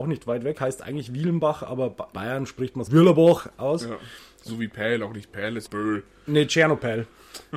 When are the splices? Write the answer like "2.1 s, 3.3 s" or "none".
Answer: 2.1 s, 2.9 s, 4.5 s, 5.7 s